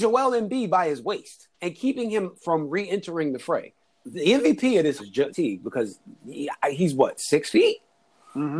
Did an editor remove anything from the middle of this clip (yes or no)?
yes